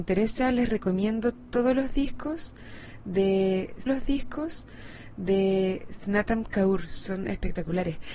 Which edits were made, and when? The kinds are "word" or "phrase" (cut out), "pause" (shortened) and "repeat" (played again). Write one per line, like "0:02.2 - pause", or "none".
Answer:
0:03.9 - repeat